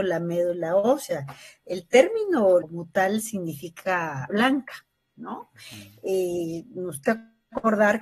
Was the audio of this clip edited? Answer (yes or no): yes